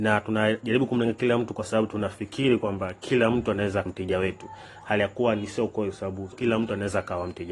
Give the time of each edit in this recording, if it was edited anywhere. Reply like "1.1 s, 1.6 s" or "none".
3.9 s, 6.3 s